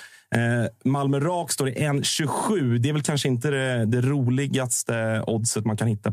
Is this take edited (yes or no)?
no